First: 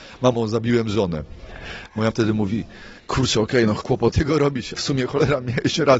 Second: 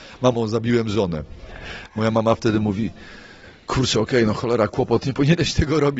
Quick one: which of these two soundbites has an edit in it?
first; 5 cuts; at 2.1 s, 3.0 s, 3.8 s, 4.1 s, 4.7 s

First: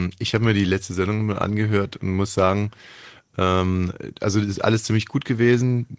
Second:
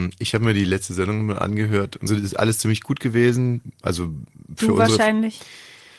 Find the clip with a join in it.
second; 1 cut; at 2.1 s

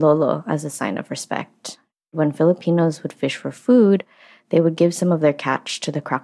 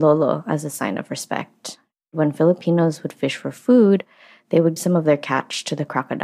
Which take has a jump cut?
second; 1 cut; at 4.8 s

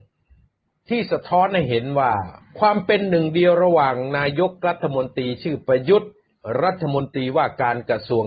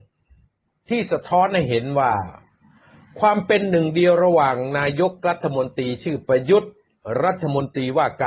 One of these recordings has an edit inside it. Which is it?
first; 1 cut; at 2.4 s

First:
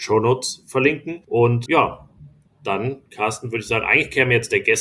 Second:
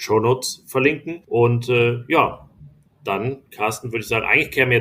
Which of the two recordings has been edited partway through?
first; 1 cut; at 1.7 s

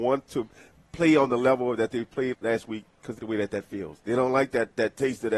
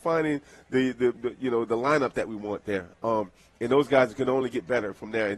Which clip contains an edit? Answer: first; 3 cuts; at 2.3 s, 3.2 s, 4.0 s

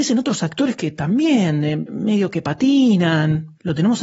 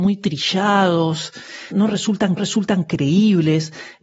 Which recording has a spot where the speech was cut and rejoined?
second; 2 cuts; at 1.7 s, 2.4 s

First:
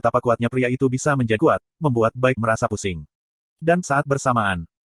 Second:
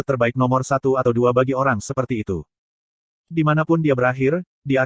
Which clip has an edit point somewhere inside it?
first; 3 cuts; at 1.4 s, 2.4 s, 3.8 s

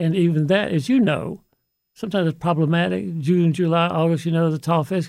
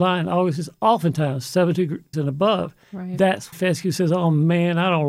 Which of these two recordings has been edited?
second; 2 cuts; at 2.1 s, 3.5 s

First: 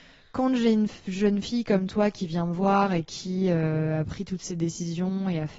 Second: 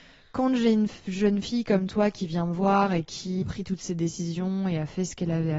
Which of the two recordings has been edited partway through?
second; 1 cut; at 3.4 s

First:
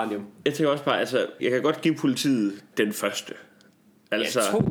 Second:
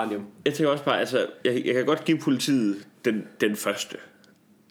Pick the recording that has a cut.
first; 2 cuts; at 1.4 s, 2.7 s

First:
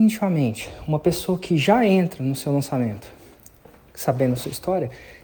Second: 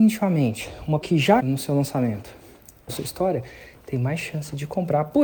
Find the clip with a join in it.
second; 3 cuts; at 1.0 s, 1.4 s, 2.9 s

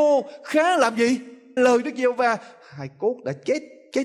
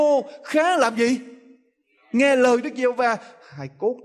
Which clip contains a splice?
first; 1 cut; at 1.6 s

